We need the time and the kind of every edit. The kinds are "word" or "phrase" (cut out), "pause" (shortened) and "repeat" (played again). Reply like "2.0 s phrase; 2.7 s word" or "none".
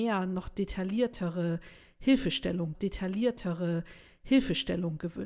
2.7 s repeat